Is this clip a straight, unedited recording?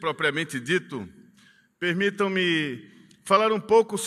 yes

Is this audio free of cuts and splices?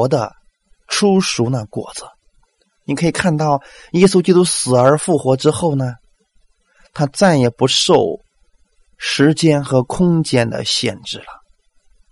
yes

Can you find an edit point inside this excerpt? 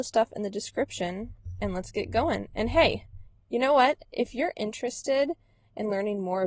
no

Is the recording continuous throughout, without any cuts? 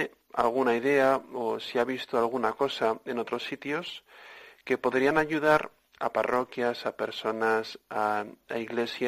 yes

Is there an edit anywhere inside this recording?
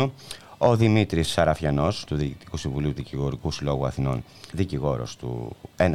yes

